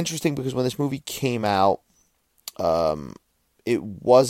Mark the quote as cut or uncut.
uncut